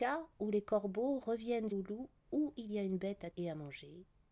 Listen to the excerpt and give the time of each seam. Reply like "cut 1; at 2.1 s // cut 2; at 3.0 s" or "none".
cut 1; at 1.7 s // cut 2; at 3.3 s